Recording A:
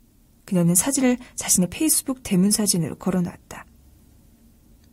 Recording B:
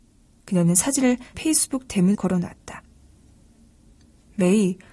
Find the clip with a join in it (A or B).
B